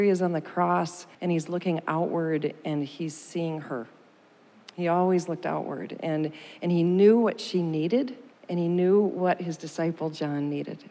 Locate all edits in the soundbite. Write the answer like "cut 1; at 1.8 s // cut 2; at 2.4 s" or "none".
cut 1; at 1.1 s // cut 2; at 8.3 s